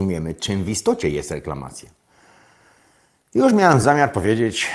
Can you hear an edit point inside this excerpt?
no; 0 cuts

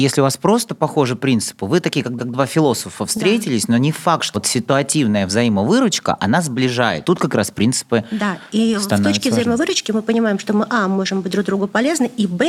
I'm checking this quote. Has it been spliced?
yes; 3 cuts; at 2.2 s, 4.3 s, 7.0 s

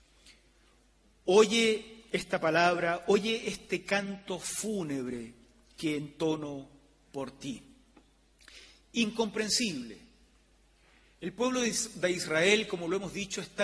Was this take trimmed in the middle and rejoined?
no; 0 cuts

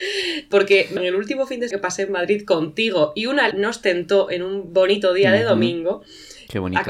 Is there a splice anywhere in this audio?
yes; 3 cuts; at 1.0 s, 1.7 s, 3.5 s

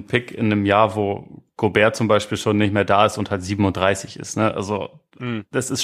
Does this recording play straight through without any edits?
yes; 0 cuts

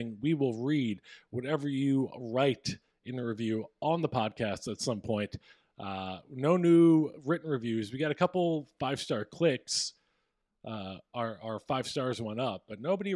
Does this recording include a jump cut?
no; 0 cuts

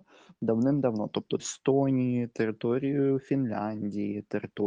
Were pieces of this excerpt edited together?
yes; 1 cut; at 1.4 s

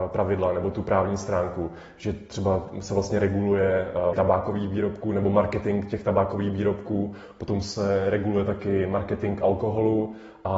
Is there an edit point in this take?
yes; 1 cut; at 4.1 s

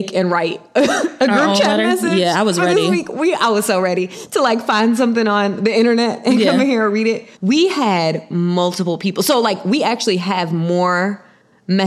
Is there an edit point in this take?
yes; 1 cut; at 7.4 s

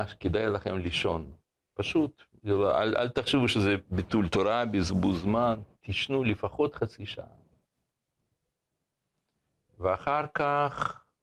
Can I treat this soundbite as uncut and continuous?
yes; 0 cuts

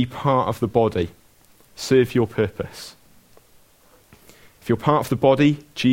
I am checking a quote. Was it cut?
no; 0 cuts

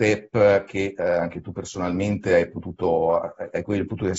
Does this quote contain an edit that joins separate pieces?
no; 0 cuts

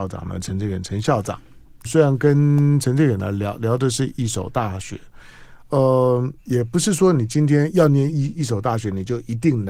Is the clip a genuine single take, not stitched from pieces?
no; 2 cuts; at 1.8 s, 6.4 s

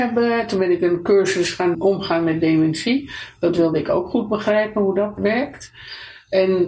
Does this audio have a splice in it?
yes; 2 cuts; at 1.7 s, 5.2 s

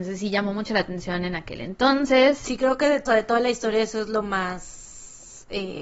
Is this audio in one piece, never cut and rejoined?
no; 1 cut; at 3.1 s

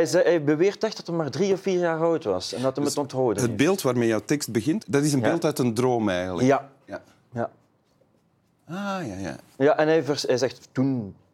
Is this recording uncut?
yes; 0 cuts

